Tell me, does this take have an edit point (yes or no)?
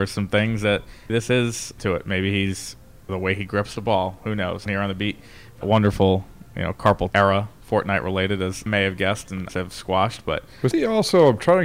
yes